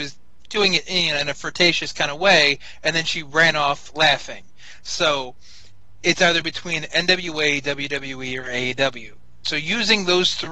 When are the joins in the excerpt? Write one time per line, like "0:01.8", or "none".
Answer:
none